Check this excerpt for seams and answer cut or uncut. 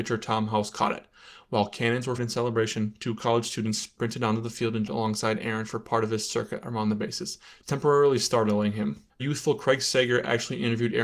cut